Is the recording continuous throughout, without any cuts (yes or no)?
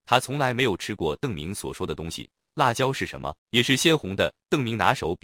no